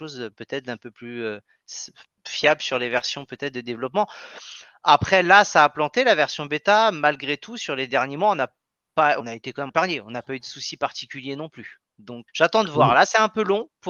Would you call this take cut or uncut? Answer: cut